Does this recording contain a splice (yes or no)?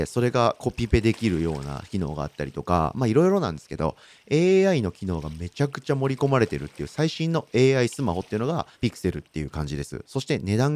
yes